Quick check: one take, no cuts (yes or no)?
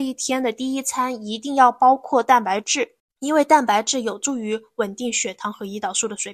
no